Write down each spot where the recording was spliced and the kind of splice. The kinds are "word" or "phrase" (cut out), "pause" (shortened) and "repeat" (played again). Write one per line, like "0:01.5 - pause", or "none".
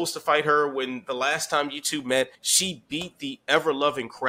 0:02.3 - pause